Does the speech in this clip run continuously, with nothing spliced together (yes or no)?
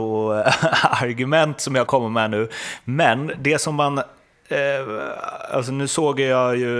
no